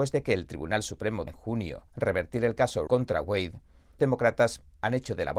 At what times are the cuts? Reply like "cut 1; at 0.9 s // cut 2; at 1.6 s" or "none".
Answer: cut 1; at 1.3 s // cut 2; at 1.9 s // cut 3; at 2.9 s // cut 4; at 4.0 s